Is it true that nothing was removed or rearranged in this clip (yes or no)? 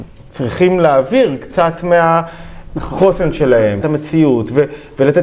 no